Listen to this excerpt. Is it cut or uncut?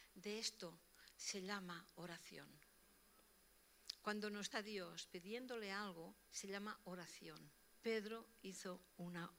cut